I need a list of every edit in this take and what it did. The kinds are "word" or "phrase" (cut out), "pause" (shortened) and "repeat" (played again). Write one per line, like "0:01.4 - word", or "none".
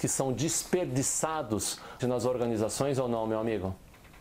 0:02.0 - word